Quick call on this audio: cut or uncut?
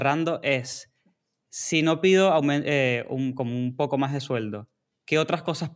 uncut